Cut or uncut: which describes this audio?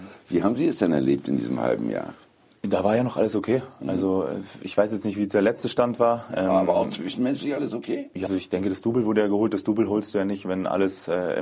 cut